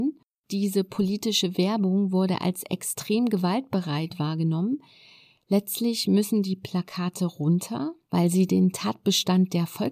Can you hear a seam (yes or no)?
no